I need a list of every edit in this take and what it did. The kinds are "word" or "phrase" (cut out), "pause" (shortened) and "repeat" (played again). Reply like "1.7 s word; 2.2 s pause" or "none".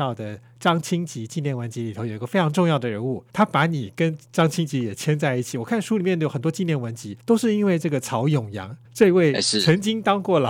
3.3 s pause; 7.2 s pause; 8.8 s pause